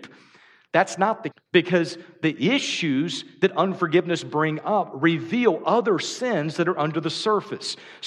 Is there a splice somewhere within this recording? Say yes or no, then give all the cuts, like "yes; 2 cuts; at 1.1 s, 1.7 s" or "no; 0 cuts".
yes; 1 cut; at 1.3 s